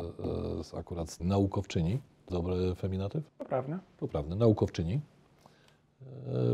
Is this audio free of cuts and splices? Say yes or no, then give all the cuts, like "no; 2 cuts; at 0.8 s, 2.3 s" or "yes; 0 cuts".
no; 3 cuts; at 1.2 s, 2.3 s, 3.3 s